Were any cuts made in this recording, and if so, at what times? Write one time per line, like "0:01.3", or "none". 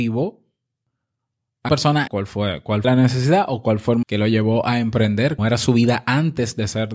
0:01.7
0:02.1
0:02.8
0:04.0
0:05.4